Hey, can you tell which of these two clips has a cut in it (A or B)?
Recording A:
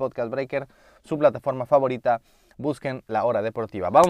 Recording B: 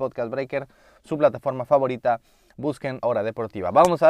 B